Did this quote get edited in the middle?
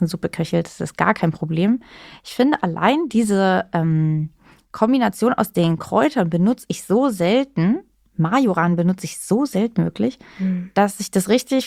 no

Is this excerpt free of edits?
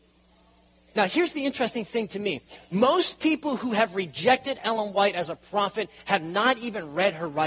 yes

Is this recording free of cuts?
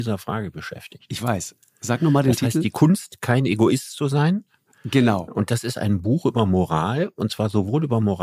yes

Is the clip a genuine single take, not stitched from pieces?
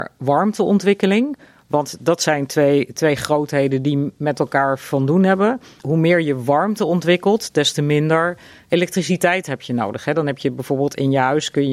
yes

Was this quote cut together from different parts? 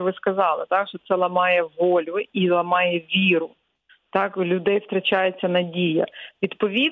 no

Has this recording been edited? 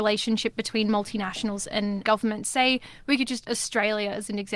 yes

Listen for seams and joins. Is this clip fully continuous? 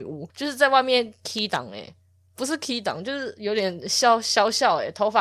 yes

